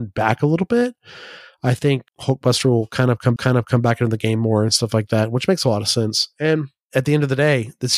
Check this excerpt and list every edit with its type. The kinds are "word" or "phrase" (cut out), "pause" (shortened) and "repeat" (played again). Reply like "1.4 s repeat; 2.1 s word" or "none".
2.1 s pause; 3.4 s repeat